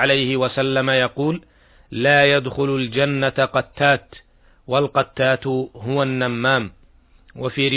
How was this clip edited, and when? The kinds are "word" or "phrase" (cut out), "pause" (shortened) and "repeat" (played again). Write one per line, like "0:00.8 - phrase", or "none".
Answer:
none